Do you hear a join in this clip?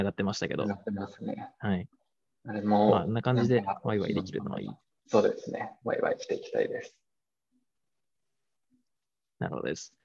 no; 0 cuts

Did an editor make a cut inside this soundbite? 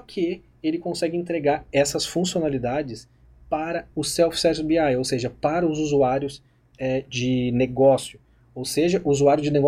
no; 0 cuts

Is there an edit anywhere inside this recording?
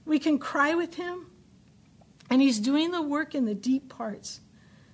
no; 0 cuts

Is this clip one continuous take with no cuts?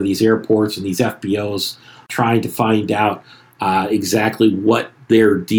yes; 0 cuts

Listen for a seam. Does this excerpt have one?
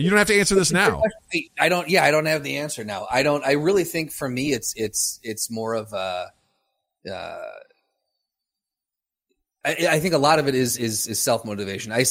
no; 0 cuts

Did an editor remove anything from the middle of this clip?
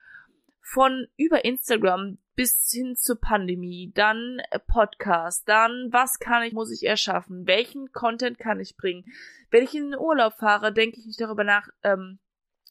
yes; 1 cut; at 6.5 s

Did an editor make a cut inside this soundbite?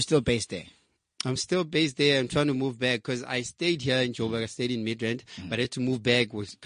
no; 0 cuts

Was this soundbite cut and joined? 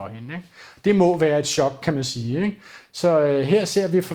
no; 0 cuts

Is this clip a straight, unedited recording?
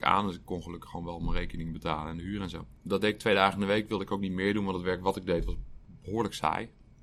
yes; 0 cuts

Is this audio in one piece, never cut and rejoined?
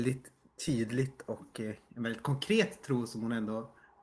yes; 0 cuts

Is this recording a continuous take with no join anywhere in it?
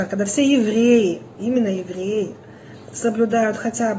yes; 0 cuts

